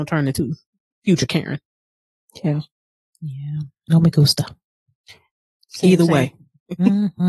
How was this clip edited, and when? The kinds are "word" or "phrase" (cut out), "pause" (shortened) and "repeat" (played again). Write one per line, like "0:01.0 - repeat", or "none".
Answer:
none